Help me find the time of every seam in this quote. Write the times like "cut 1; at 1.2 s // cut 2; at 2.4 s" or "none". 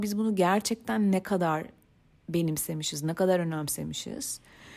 none